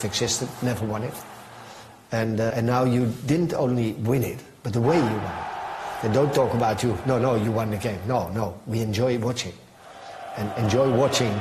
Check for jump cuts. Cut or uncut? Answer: cut